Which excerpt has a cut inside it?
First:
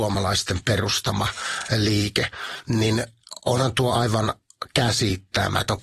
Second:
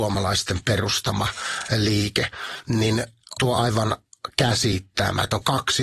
second; 1 cut; at 3.4 s

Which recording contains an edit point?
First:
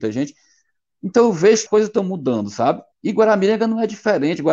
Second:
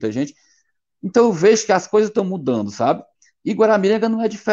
first; 2 cuts; at 1.7 s, 2.9 s

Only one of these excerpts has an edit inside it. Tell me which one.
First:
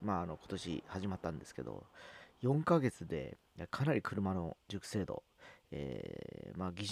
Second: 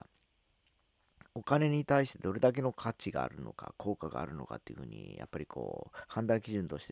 first; 1 cut; at 4.6 s

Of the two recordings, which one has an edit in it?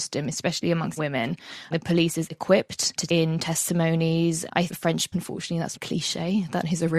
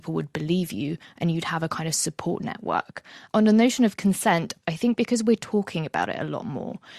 first; 7 cuts; at 1.0 s, 1.7 s, 2.3 s, 3.1 s, 4.7 s, 5.1 s, 5.7 s

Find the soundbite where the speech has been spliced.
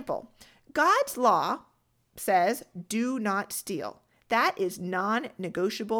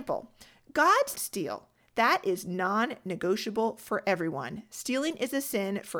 second; 1 cut; at 1.1 s

